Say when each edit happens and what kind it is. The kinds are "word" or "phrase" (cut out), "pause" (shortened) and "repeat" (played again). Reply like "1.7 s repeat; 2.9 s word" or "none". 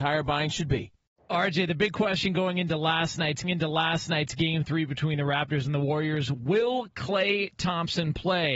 1.2 s pause; 3.4 s repeat; 6.3 s word